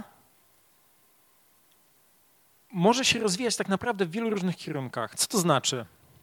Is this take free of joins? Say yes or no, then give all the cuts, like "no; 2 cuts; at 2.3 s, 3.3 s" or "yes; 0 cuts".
yes; 0 cuts